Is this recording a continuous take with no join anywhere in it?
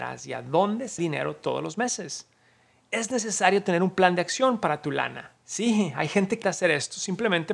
no; 3 cuts; at 1.0 s, 5.4 s, 6.4 s

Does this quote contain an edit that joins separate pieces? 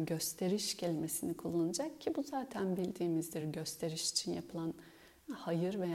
no; 0 cuts

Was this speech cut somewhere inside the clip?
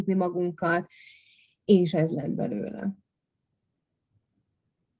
no; 0 cuts

